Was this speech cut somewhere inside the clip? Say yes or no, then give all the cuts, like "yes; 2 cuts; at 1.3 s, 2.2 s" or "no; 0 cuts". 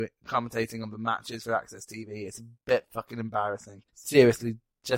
yes; 1 cut; at 3.9 s